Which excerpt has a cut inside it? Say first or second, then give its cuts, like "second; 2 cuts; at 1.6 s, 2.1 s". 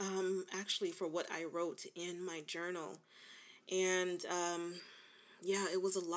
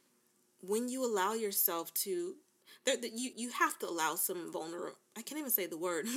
second; 1 cut; at 3.3 s